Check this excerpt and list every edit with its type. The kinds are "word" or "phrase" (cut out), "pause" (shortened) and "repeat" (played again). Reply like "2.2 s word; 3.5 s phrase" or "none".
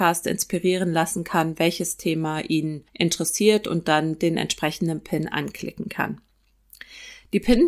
2.9 s pause